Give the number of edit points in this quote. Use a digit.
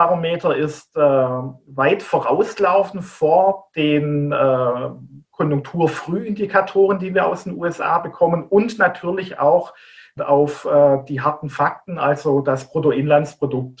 1